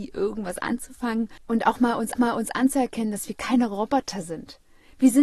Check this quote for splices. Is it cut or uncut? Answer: cut